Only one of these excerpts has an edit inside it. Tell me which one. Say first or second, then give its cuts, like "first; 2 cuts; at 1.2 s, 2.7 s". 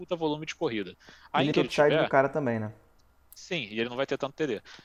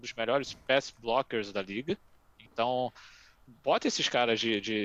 first; 1 cut; at 1.5 s